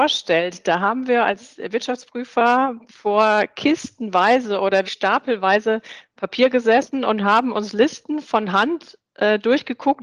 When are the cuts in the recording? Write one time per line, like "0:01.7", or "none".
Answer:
0:04.8